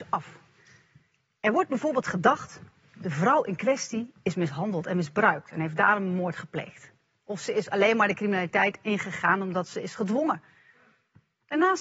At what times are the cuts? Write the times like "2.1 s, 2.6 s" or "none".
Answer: none